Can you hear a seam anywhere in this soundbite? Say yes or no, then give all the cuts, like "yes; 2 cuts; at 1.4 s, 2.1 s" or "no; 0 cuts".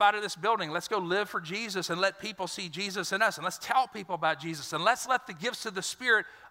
no; 0 cuts